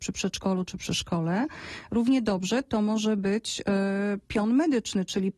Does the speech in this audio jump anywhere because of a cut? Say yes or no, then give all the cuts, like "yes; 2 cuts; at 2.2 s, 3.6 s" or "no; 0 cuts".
no; 0 cuts